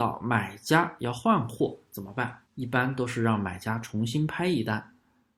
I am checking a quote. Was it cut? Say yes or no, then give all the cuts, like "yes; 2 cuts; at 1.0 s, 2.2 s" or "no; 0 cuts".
yes; 1 cut; at 2.5 s